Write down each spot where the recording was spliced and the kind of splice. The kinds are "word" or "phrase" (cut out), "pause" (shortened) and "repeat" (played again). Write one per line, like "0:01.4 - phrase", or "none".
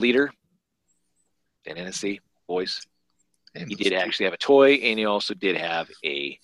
none